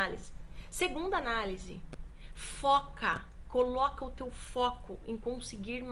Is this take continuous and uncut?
yes; 0 cuts

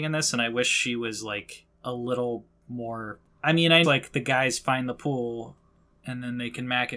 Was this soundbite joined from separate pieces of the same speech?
yes; 1 cut; at 3.8 s

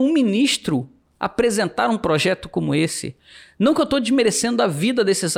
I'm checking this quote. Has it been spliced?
no; 0 cuts

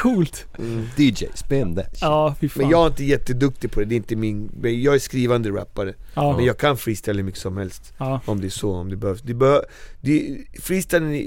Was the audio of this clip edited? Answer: no; 0 cuts

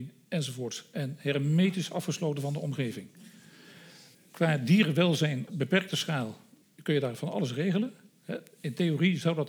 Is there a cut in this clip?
yes; 3 cuts; at 4.1 s, 5.5 s, 6.6 s

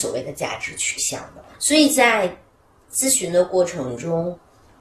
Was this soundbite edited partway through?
yes; 1 cut; at 1.5 s

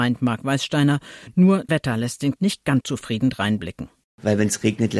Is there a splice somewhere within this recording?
yes; 3 cuts; at 1.7 s, 2.4 s, 2.8 s

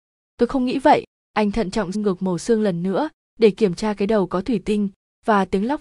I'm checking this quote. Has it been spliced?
yes; 1 cut; at 1.9 s

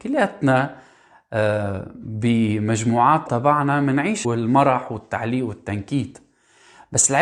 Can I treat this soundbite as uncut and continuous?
no; 2 cuts; at 3.3 s, 4.2 s

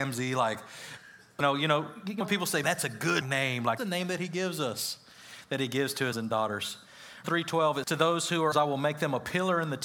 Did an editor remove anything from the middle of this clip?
yes; 9 cuts; at 1.4 s, 2.2 s, 2.6 s, 3.2 s, 3.8 s, 6.1 s, 7.2 s, 7.8 s, 8.5 s

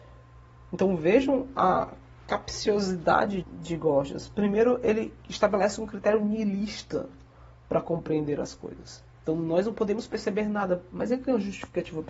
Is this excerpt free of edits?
no; 3 cuts; at 3.4 s, 5.2 s, 9.1 s

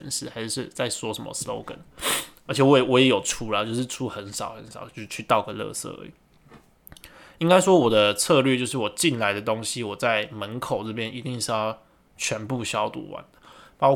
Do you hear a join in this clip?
no; 0 cuts

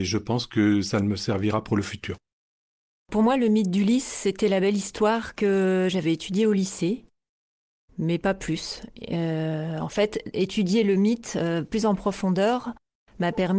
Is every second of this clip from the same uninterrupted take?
yes; 0 cuts

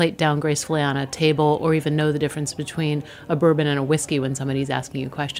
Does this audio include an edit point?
no; 0 cuts

